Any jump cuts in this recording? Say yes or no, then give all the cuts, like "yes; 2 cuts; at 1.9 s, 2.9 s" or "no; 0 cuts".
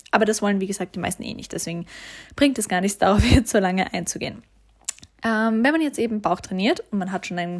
no; 0 cuts